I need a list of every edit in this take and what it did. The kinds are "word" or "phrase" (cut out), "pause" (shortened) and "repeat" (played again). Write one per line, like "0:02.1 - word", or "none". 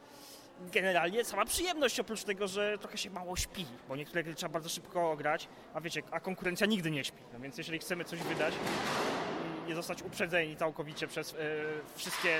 0:06.1 - word